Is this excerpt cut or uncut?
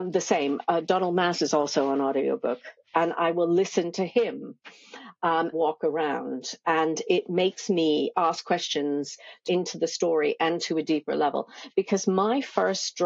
cut